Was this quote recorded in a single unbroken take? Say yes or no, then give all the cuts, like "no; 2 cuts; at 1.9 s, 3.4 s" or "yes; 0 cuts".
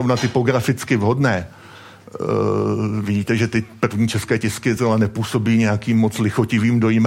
yes; 0 cuts